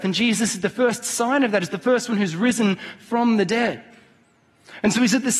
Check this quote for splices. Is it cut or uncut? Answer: uncut